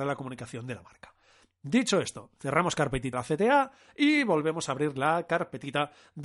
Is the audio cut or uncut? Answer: cut